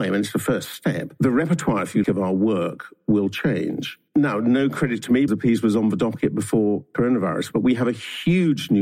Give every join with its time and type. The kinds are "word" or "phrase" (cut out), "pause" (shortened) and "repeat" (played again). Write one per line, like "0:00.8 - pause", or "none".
0:02.0 - word
0:04.1 - pause
0:05.3 - word